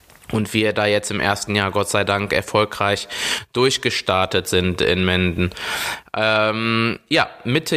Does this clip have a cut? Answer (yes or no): no